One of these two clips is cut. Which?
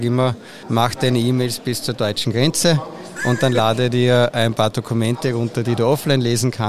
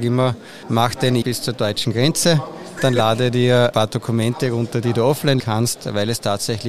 second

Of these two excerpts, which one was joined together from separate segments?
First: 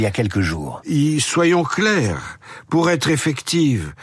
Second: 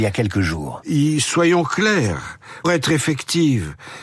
second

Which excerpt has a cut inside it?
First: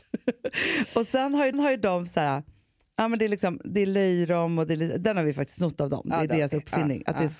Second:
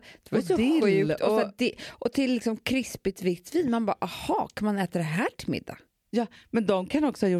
first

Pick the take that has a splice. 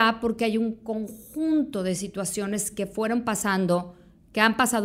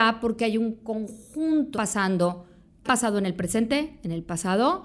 second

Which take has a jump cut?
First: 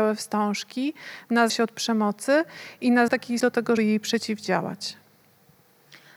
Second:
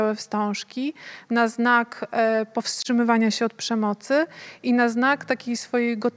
first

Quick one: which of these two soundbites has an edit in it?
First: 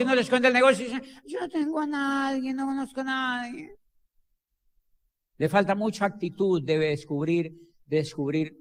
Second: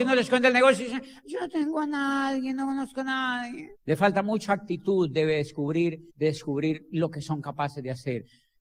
second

